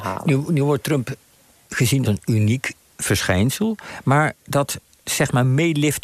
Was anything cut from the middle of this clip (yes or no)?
yes